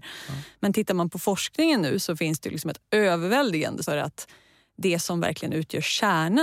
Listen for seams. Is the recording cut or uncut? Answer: cut